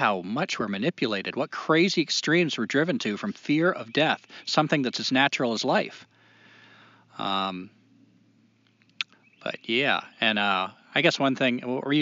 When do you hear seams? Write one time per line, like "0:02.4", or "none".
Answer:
none